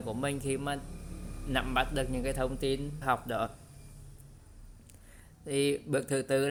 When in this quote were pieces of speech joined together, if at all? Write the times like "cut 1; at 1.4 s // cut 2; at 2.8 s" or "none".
cut 1; at 3.0 s